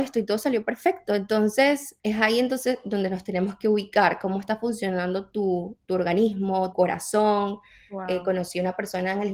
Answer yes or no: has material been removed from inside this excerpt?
yes